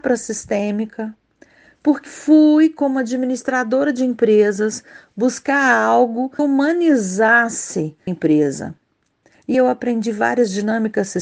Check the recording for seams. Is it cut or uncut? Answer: cut